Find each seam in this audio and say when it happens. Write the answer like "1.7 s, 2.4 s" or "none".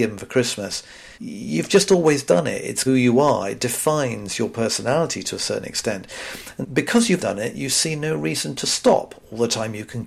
1.1 s, 2.9 s, 6.6 s, 7.2 s